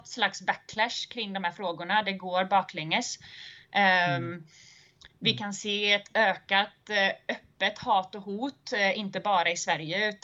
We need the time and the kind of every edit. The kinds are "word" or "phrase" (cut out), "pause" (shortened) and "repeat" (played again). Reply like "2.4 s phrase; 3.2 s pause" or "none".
none